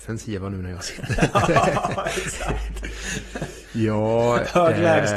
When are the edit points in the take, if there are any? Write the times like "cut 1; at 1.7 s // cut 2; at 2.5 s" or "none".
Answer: none